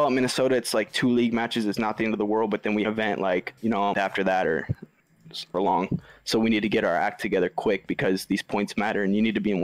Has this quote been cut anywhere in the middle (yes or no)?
yes